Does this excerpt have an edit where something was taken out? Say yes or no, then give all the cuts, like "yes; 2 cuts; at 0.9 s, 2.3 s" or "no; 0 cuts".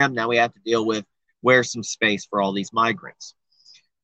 no; 0 cuts